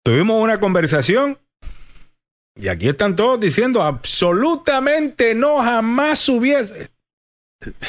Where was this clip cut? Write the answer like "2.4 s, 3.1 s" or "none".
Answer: none